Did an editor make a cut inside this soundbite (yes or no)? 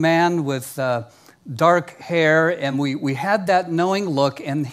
no